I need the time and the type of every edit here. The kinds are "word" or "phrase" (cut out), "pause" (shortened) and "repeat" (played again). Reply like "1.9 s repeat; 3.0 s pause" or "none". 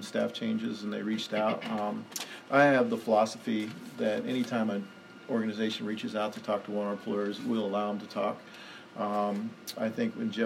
none